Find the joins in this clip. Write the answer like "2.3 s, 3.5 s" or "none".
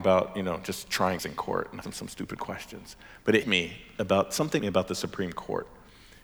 1.2 s, 1.8 s, 3.4 s, 4.6 s